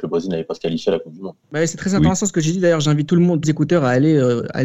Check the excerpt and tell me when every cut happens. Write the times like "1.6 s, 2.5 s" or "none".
1.4 s, 3.4 s